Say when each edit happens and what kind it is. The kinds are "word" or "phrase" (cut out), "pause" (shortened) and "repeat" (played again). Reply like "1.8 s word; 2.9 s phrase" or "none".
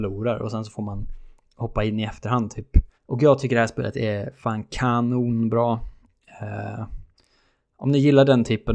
2.9 s pause